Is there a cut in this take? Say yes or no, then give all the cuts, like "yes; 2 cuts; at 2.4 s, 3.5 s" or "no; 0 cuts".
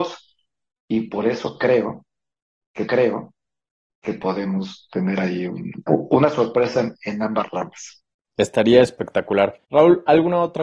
yes; 4 cuts; at 2.9 s, 5.9 s, 8.1 s, 9.6 s